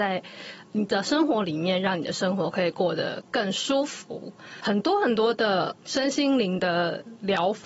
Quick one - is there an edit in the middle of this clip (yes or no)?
no